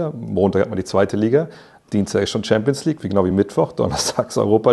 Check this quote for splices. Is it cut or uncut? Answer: uncut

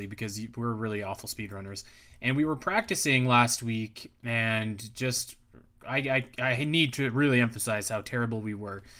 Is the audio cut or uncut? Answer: uncut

